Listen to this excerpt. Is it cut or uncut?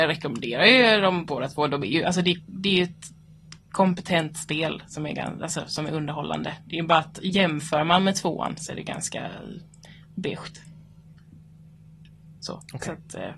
cut